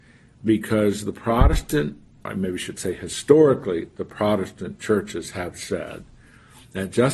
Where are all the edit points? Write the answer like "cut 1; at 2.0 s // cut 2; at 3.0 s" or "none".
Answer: cut 1; at 2.3 s